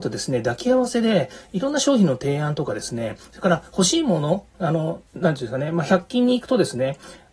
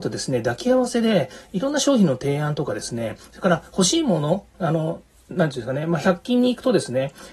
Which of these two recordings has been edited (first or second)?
first